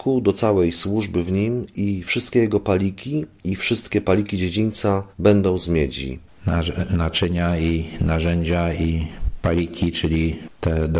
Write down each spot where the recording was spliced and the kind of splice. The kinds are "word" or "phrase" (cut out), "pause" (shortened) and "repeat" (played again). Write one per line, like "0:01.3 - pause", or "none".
0:05.1 - pause